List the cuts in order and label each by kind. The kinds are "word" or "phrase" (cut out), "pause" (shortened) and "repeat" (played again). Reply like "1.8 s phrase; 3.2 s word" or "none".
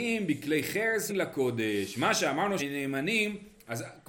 1.1 s word; 2.6 s word